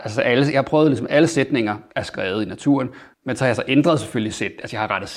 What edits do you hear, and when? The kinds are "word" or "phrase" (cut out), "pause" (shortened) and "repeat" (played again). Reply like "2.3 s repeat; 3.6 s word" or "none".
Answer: 1.9 s pause; 3.1 s pause